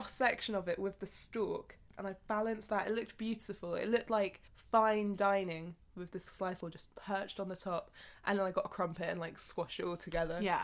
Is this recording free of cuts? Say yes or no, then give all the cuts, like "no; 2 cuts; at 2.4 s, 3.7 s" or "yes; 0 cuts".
no; 3 cuts; at 4.5 s, 6.3 s, 6.6 s